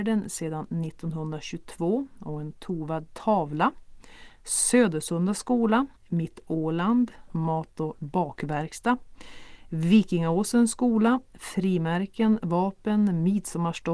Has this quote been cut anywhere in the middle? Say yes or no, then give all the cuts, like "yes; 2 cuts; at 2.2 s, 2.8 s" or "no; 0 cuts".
yes; 2 cuts; at 6.0 s, 7.3 s